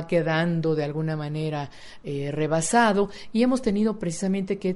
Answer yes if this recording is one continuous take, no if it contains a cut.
yes